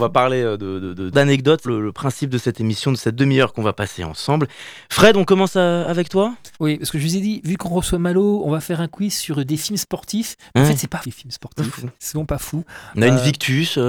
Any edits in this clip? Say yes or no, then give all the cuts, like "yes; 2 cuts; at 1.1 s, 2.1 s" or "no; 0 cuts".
yes; 5 cuts; at 1.1 s, 1.6 s, 6.5 s, 11.0 s, 11.9 s